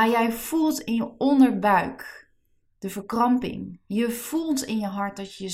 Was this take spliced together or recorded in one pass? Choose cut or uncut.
uncut